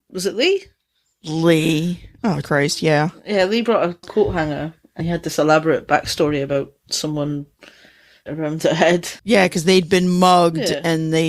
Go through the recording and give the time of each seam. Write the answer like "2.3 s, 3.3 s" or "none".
2.4 s, 4.0 s, 5.0 s, 8.3 s, 9.2 s